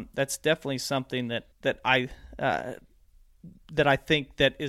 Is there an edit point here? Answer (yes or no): yes